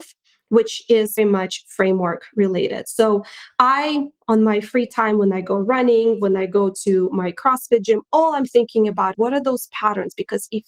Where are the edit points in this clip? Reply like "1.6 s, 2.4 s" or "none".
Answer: 1.2 s, 9.1 s

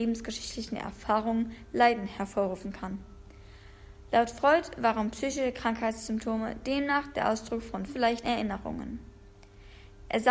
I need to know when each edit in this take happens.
7.9 s, 8.2 s

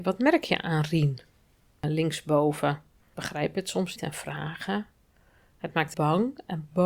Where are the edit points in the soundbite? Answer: 3.1 s, 4.0 s, 5.9 s

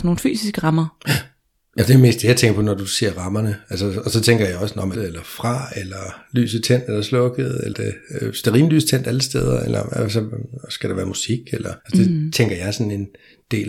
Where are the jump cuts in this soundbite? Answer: 5.0 s, 7.7 s, 11.8 s

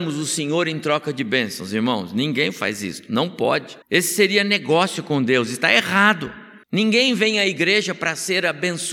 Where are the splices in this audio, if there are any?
3.8 s, 6.6 s

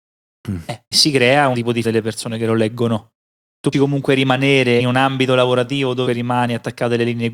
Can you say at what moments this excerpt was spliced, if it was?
0.9 s, 1.5 s, 1.8 s, 3.7 s, 4.8 s, 6.1 s

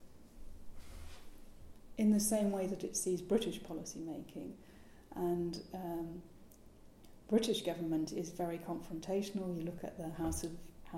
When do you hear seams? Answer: none

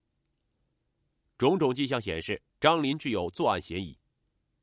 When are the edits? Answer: 2.5 s

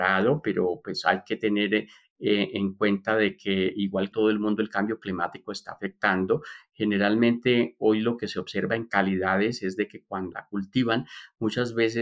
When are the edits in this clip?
4.1 s, 10.3 s

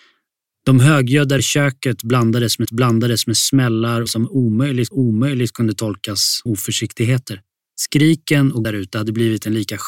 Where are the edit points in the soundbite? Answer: 1.4 s, 2.6 s, 4.1 s, 4.9 s, 6.5 s, 7.6 s, 8.6 s

